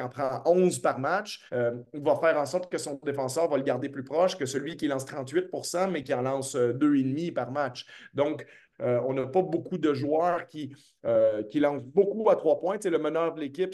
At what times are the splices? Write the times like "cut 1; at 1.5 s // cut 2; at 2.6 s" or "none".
cut 1; at 1.5 s